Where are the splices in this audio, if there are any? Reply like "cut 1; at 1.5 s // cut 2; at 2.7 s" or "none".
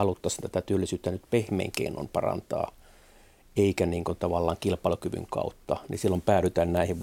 none